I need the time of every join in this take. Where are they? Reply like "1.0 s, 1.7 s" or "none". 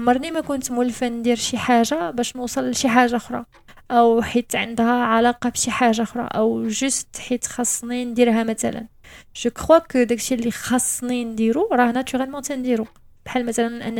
none